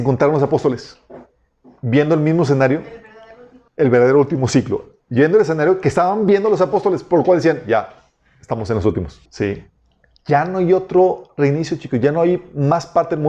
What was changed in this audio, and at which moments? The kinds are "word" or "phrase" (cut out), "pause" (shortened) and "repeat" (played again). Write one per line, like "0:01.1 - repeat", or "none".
0:03.7 - pause
0:09.3 - pause